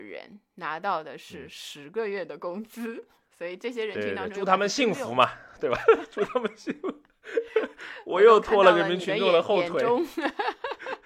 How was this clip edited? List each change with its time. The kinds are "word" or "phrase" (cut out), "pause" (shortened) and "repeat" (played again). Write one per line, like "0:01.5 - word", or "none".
none